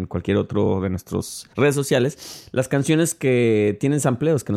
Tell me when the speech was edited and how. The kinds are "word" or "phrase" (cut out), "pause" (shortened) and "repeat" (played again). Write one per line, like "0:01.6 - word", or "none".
0:01.5 - pause